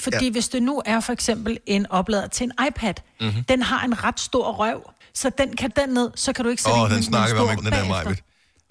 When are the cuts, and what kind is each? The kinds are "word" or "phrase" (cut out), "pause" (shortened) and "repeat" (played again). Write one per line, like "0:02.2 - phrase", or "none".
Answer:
0:05.0 - pause
0:05.7 - phrase
0:07.6 - word

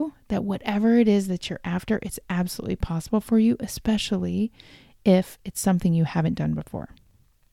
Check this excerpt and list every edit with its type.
none

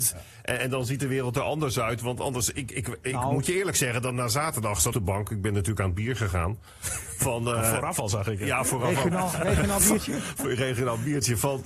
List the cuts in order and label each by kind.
0:04.9 - phrase

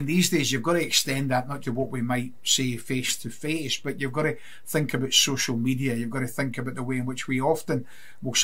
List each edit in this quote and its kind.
0:01.6 - word

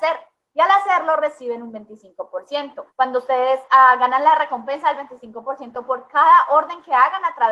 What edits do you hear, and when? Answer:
0:02.9 - pause

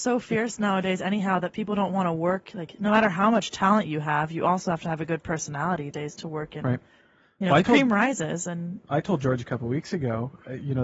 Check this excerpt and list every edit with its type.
0:05.9 - word

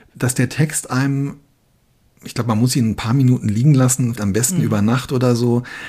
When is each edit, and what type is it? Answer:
0:04.2 - word

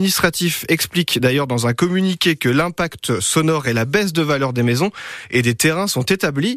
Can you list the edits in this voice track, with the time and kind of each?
none

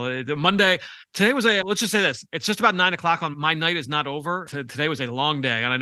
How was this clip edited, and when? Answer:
0:01.0 - pause
0:01.6 - word
0:03.3 - word
0:04.5 - word

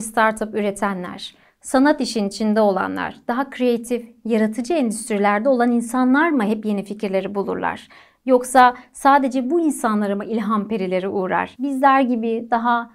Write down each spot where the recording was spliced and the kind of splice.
none

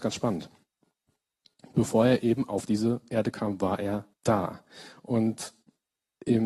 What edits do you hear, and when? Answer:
0:04.1 - pause

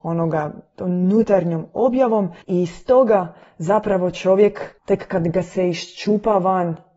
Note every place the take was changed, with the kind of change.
0:02.4 - pause
0:04.8 - pause

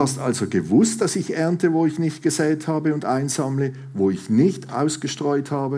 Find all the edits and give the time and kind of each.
none

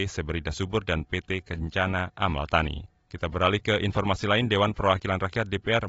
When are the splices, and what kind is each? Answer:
0:03.0 - pause

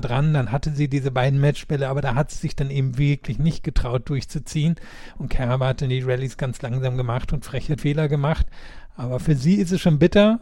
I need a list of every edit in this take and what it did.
0:07.8 - word

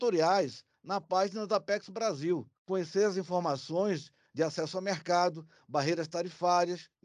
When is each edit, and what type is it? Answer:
0:02.6 - pause

